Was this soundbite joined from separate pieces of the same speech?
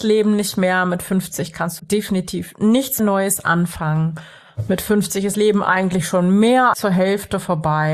yes; 4 cuts; at 1.8 s, 3.0 s, 5.3 s, 6.7 s

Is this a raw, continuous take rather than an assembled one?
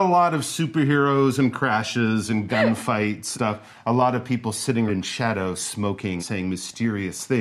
no; 4 cuts; at 1.5 s, 3.3 s, 4.9 s, 6.2 s

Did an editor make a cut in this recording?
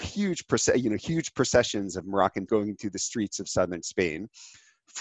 yes; 1 cut; at 2.5 s

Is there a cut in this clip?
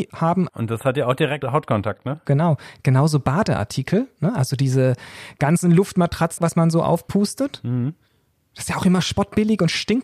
yes; 1 cut; at 6.4 s

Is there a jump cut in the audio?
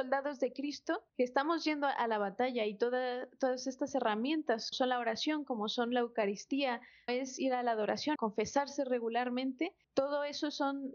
yes; 5 cuts; at 1.1 s, 4.7 s, 7.1 s, 8.2 s, 9.8 s

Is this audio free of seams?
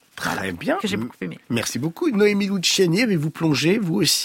no; 1 cut; at 1.4 s

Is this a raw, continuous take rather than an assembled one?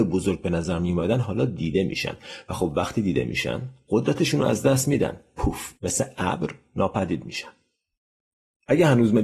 no; 1 cut; at 5.8 s

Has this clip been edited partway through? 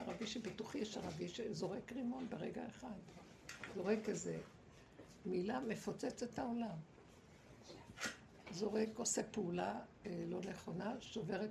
no; 0 cuts

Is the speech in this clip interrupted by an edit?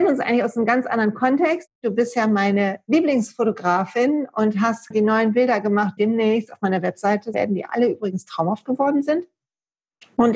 yes; 3 cuts; at 4.9 s, 6.0 s, 7.3 s

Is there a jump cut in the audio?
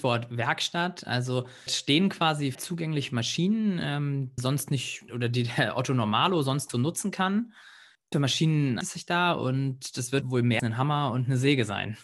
yes; 9 cuts; at 1.7 s, 2.5 s, 4.4 s, 5.1 s, 6.7 s, 8.1 s, 8.8 s, 10.2 s, 10.6 s

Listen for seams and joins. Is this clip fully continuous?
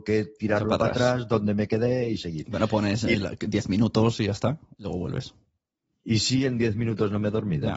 yes; 0 cuts

